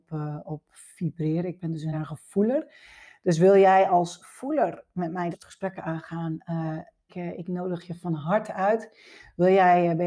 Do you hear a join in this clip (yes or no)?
yes